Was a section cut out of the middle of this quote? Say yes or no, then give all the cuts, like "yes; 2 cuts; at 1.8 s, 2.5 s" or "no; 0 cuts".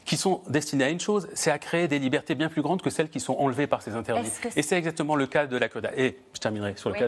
no; 0 cuts